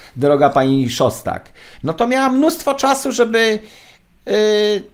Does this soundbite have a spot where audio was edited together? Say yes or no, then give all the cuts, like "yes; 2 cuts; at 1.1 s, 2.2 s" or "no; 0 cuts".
no; 0 cuts